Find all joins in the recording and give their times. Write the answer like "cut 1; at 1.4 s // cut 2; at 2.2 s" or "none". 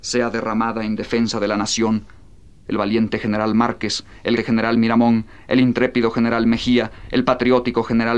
cut 1; at 4.4 s